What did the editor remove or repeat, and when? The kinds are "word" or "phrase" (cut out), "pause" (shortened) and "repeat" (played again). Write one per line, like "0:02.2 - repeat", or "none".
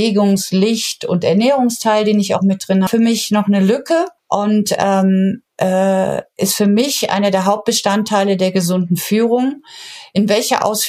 0:02.9 - phrase
0:04.2 - pause
0:05.5 - pause